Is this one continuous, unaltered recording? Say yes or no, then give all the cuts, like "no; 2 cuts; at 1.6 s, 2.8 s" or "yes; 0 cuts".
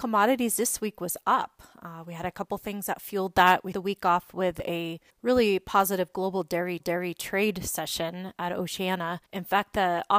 no; 5 cuts; at 3.7 s, 5.1 s, 6.8 s, 8.4 s, 9.3 s